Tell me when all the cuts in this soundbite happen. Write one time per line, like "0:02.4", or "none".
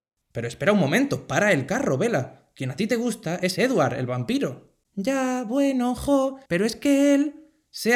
0:04.8
0:06.4

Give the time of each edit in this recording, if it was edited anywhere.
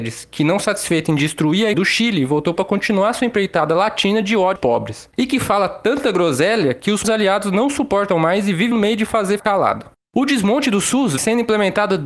0:01.7
0:02.6
0:04.6
0:07.0
0:08.7
0:09.4
0:11.2

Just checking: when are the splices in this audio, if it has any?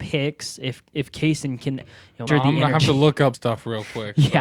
0:01.8
0:02.3
0:03.3

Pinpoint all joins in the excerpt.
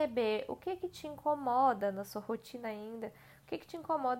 none

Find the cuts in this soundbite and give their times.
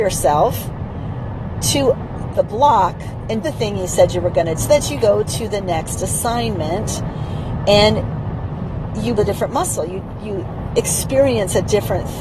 0:02.3
0:03.4
0:04.6
0:05.0
0:09.2

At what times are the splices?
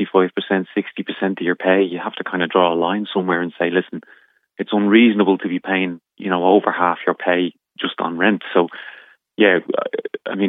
0:06.1
0:07.6

